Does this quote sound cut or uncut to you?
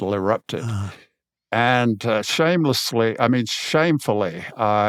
uncut